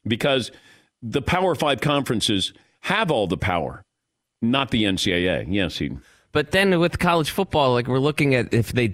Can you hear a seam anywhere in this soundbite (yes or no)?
no